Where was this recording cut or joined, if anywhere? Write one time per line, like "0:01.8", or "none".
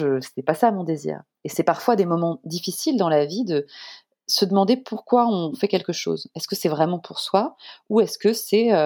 none